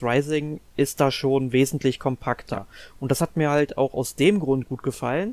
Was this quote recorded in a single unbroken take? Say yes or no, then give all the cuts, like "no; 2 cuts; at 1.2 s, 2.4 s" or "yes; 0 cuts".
yes; 0 cuts